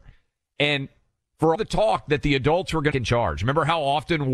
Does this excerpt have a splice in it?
yes; 2 cuts; at 1.5 s, 2.9 s

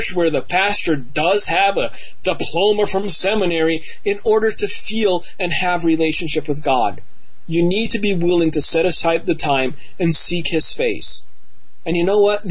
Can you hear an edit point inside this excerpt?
no; 0 cuts

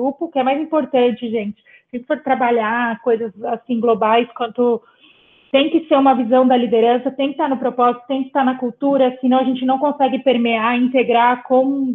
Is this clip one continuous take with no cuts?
yes; 0 cuts

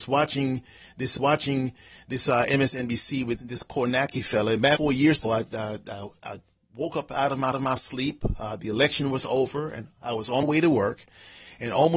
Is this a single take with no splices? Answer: no; 6 cuts; at 1.2 s, 3.4 s, 4.8 s, 5.2 s, 7.5 s, 10.4 s

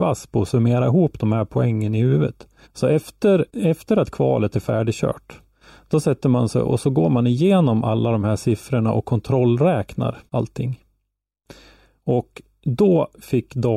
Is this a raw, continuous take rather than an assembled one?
no; 3 cuts; at 2.6 s, 3.5 s, 10.3 s

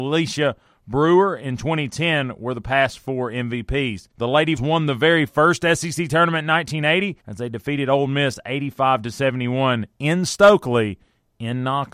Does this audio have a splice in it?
yes; 3 cuts; at 4.1 s, 4.6 s, 7.2 s

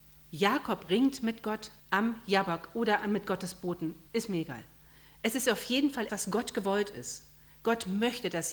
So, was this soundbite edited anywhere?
yes; 3 cuts; at 1.8 s, 4.1 s, 6.1 s

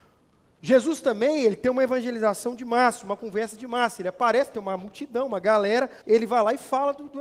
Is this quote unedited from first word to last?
no; 1 cut; at 6.0 s

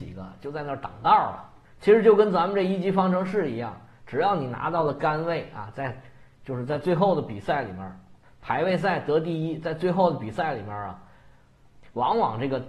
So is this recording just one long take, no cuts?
yes; 0 cuts

